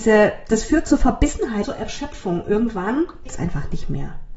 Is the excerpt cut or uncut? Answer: cut